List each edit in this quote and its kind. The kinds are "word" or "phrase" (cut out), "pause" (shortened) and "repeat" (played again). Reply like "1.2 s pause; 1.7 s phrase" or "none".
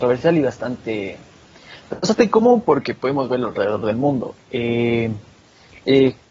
none